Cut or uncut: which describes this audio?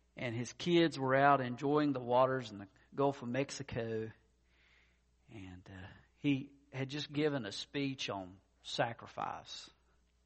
uncut